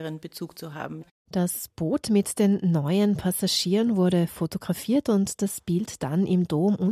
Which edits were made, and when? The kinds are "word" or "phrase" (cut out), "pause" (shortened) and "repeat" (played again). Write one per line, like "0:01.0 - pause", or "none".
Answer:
none

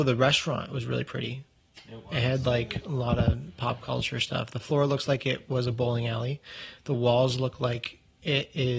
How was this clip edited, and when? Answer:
none

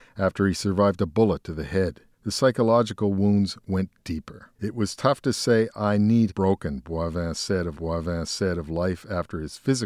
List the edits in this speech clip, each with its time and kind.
0:02.1 - pause
0:04.5 - pause
0:06.3 - phrase
0:07.7 - repeat

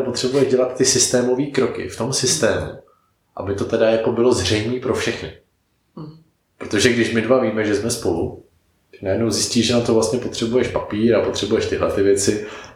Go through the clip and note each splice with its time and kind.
none

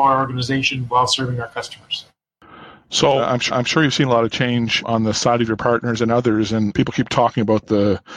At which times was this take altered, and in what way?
0:03.5 - repeat

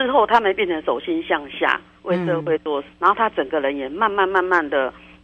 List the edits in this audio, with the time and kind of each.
0:02.9 - word

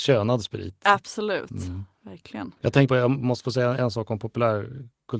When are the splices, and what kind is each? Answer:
0:02.6 - pause
0:02.9 - word

